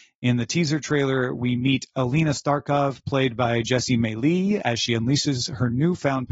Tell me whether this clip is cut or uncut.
uncut